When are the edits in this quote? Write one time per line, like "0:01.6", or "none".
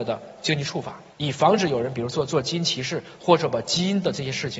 0:01.1